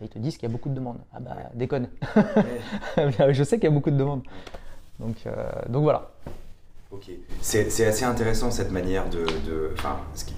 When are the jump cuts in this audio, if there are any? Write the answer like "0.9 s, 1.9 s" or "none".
none